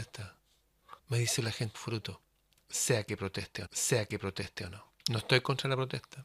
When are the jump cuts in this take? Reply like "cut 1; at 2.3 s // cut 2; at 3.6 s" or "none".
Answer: cut 1; at 1.0 s // cut 2; at 1.4 s // cut 3; at 1.7 s // cut 4; at 3.7 s // cut 5; at 4.9 s

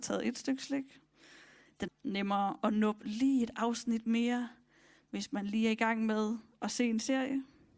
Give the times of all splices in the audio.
cut 1; at 1.9 s

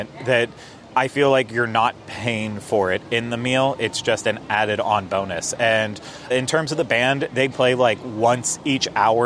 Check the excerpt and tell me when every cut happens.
cut 1; at 6.3 s // cut 2; at 7.5 s

